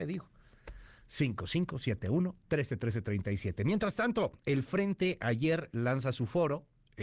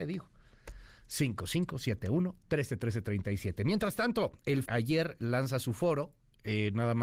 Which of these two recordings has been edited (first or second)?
second